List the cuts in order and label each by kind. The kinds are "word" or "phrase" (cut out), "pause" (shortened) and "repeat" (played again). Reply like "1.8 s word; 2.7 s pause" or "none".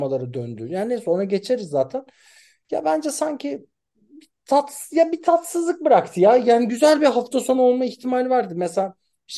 none

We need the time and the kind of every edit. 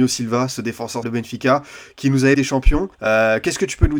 1.0 s word; 2.3 s phrase; 2.9 s pause

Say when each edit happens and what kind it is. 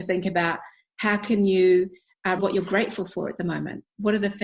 2.4 s word

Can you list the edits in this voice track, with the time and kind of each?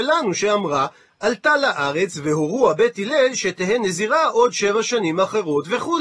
none

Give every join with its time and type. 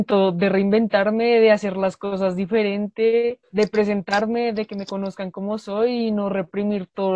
3.4 s pause

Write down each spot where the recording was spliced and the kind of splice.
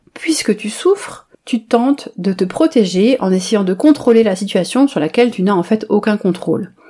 1.3 s pause

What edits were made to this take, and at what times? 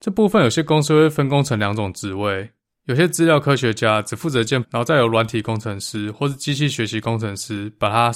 4.6 s word

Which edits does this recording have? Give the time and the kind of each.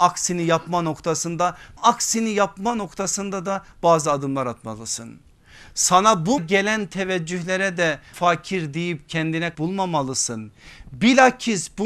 1.8 s word; 6.4 s word; 8.1 s word; 9.5 s word

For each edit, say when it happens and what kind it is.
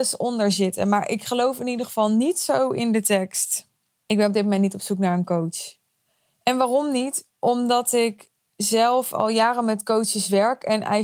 none

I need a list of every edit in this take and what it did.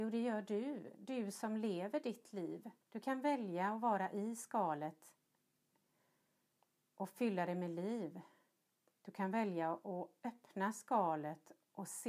2.8 s pause

